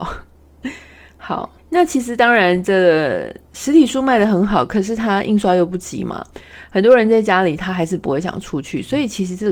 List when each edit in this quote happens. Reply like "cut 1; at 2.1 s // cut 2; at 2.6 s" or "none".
cut 1; at 1.6 s